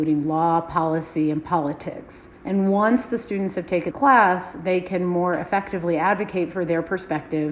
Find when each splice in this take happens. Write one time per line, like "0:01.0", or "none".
0:02.4
0:03.9